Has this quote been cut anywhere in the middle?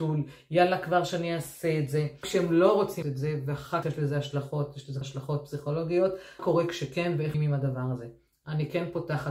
yes; 6 cuts; at 2.2 s, 3.0 s, 3.8 s, 5.0 s, 6.4 s, 7.3 s

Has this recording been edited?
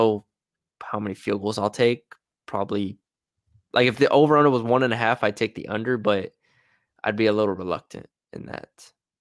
no; 0 cuts

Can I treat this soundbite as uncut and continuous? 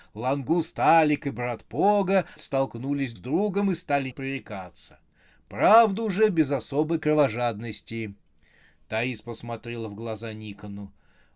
no; 3 cuts; at 2.4 s, 3.2 s, 4.1 s

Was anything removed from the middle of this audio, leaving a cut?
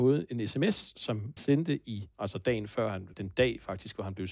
yes; 3 cuts; at 1.4 s, 2.1 s, 3.1 s

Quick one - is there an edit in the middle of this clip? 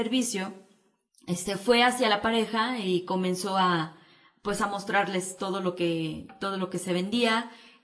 no; 0 cuts

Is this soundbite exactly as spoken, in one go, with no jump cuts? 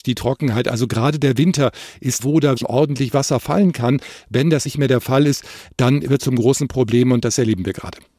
no; 4 cuts; at 2.2 s, 2.6 s, 4.7 s, 6.2 s

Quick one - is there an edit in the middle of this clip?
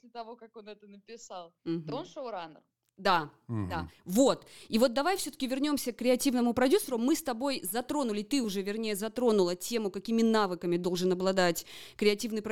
no; 0 cuts

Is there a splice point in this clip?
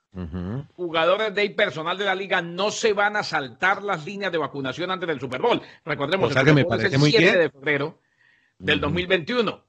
no; 0 cuts

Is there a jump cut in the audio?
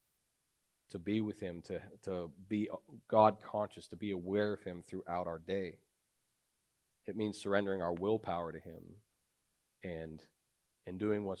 no; 0 cuts

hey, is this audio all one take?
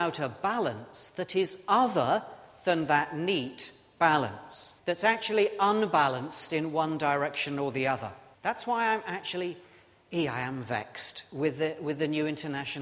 no; 2 cuts; at 4.8 s, 8.3 s

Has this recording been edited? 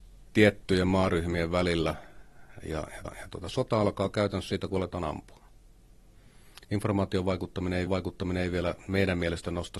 yes; 2 cuts; at 3.1 s, 7.9 s

